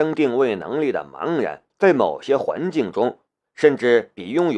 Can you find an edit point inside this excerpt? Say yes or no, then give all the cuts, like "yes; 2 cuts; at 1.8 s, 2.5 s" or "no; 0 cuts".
yes; 1 cut; at 1.7 s